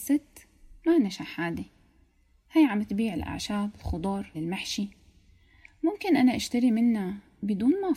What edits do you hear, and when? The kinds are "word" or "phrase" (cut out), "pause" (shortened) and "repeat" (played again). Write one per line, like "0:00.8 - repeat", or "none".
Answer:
0:04.3 - word